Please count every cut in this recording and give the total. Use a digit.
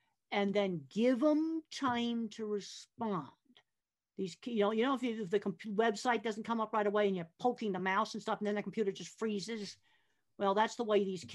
0